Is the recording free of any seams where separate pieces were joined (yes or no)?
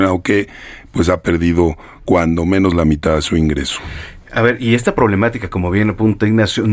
yes